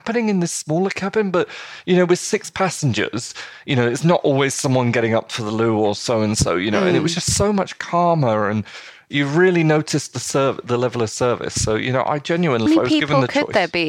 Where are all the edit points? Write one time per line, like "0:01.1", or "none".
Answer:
0:12.7

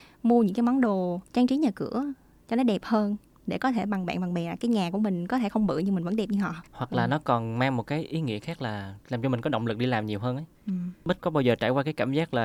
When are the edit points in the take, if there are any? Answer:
0:06.7
0:10.5

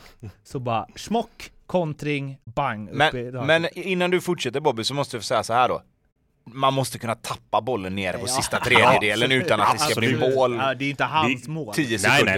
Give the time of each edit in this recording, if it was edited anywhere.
0:02.4

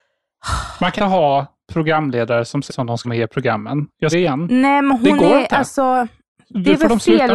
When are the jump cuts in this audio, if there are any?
0:01.0
0:02.7
0:03.0
0:04.1

